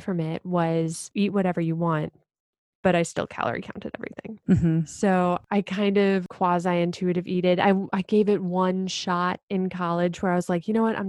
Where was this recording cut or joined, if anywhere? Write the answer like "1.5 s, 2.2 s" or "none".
none